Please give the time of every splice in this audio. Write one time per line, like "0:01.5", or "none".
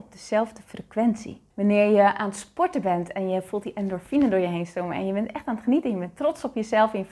0:01.5